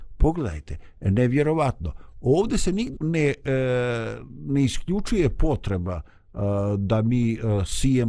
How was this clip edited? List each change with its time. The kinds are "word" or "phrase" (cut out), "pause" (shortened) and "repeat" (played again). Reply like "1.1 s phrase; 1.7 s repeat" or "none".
3.0 s word